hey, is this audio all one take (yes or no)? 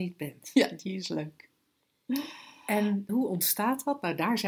no